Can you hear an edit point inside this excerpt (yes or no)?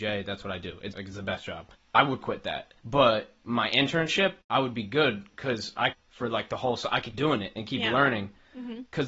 yes